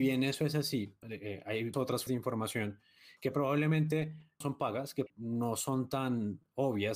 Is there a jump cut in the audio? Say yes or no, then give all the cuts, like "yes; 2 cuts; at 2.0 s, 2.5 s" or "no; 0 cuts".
yes; 5 cuts; at 1.0 s, 1.7 s, 2.1 s, 4.4 s, 5.1 s